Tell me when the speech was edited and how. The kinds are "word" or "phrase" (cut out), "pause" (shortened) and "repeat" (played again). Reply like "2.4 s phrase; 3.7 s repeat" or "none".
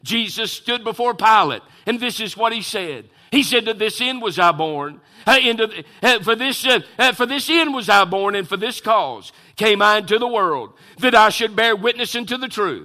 none